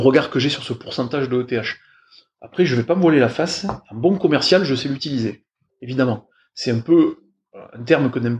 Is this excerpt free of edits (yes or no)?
yes